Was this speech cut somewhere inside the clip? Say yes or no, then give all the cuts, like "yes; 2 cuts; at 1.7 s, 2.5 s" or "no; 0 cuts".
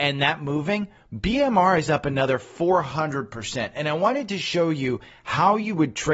no; 0 cuts